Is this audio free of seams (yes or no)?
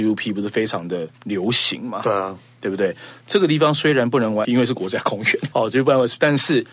no